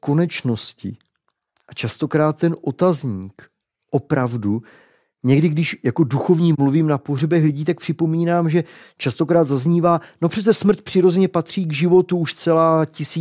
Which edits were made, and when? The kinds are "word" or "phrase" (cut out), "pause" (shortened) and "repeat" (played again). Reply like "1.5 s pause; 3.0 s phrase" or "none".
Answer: none

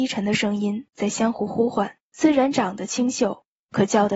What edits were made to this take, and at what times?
2.0 s pause

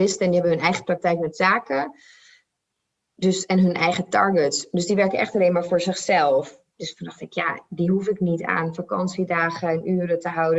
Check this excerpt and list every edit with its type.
none

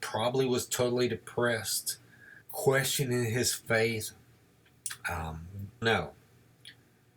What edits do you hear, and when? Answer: 2.4 s pause; 5.8 s phrase

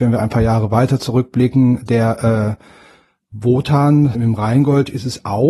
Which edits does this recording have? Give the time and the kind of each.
4.1 s word

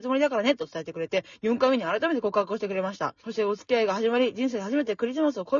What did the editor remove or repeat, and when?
3.2 s pause

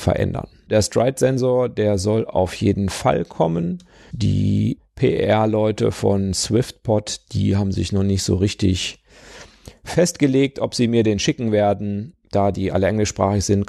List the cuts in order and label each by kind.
none

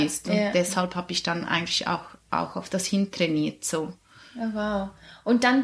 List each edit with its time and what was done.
none

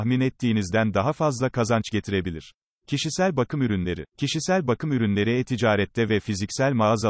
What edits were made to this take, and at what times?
2.6 s pause; 4.1 s pause

